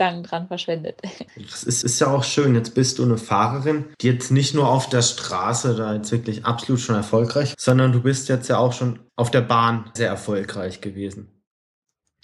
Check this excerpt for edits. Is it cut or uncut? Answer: cut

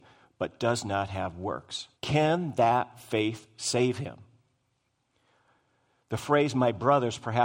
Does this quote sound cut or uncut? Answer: cut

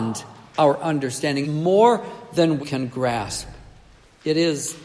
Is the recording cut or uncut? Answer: cut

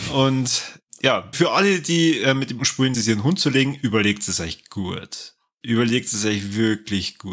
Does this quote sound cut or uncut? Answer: cut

